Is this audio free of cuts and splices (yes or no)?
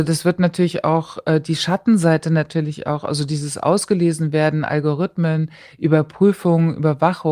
yes